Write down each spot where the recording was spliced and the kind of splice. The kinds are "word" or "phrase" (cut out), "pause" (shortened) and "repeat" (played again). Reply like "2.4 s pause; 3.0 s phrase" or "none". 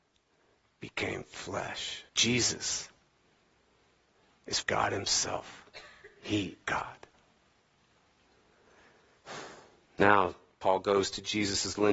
2.1 s pause; 4.6 s word; 6.6 s word